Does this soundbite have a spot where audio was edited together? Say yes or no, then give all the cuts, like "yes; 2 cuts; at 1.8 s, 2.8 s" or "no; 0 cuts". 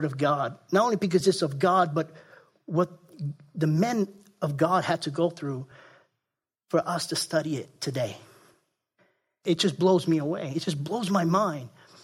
no; 0 cuts